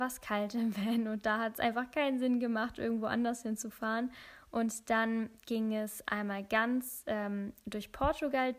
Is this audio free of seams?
yes; 0 cuts

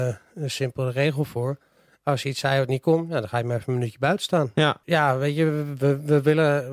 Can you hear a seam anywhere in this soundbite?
no; 0 cuts

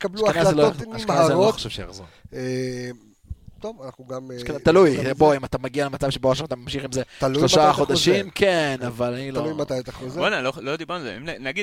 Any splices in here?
no; 0 cuts

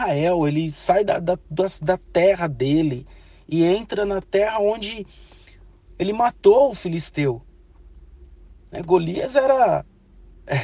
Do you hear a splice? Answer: no; 0 cuts

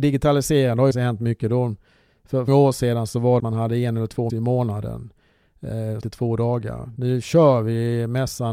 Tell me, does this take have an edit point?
yes; 5 cuts; at 0.9 s, 2.5 s, 3.4 s, 4.3 s, 6.0 s

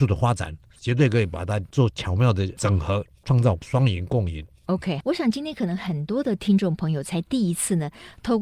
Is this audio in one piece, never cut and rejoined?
no; 1 cut; at 5.0 s

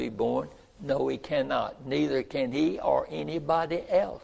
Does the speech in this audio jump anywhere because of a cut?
no; 0 cuts

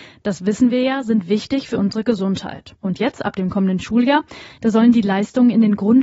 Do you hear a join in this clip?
yes; 1 cut; at 2.8 s

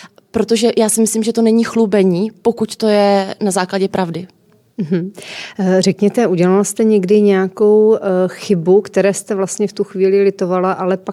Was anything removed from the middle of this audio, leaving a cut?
no; 0 cuts

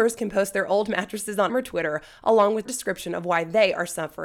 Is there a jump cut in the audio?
yes; 2 cuts; at 1.5 s, 2.7 s

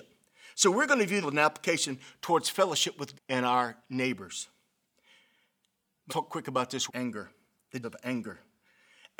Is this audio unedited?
no; 5 cuts; at 1.2 s, 3.1 s, 6.1 s, 6.9 s, 7.8 s

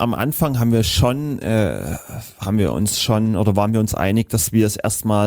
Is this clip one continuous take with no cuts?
yes; 0 cuts

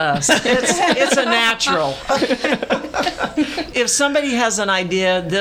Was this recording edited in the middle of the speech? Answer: yes; 1 cut; at 3.7 s

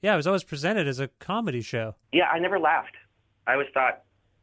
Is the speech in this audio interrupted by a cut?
yes; 1 cut; at 2.0 s

